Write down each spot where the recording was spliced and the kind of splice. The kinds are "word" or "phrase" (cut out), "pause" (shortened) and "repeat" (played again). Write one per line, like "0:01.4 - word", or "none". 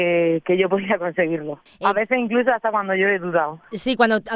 0:01.7 - pause